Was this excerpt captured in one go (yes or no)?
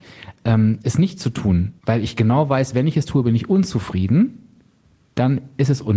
no